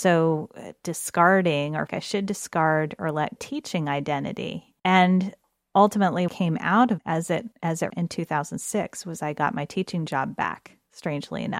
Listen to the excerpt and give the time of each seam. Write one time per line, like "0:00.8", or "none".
0:01.9
0:03.4
0:04.8
0:06.3
0:07.0
0:07.5
0:07.9